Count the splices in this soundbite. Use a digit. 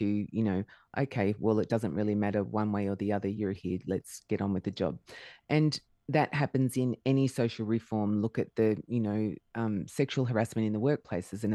1